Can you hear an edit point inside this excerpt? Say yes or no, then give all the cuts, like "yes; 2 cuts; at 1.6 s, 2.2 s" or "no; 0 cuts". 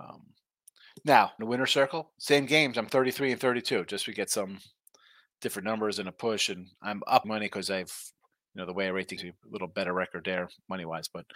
yes; 3 cuts; at 1.4 s, 7.2 s, 9.2 s